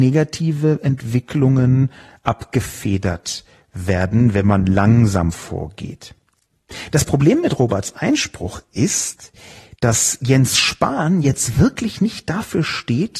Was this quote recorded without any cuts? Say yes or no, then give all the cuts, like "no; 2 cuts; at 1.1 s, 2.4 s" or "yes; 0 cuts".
yes; 0 cuts